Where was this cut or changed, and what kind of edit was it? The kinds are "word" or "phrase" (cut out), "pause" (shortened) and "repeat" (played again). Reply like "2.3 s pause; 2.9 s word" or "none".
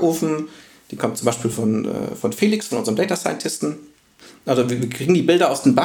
none